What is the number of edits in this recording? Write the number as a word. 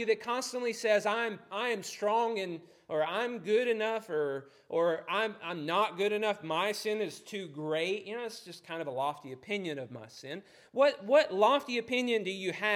zero